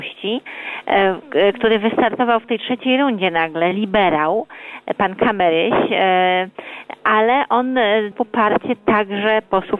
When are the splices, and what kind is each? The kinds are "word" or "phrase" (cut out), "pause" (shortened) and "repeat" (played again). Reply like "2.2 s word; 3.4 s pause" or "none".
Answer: 8.1 s word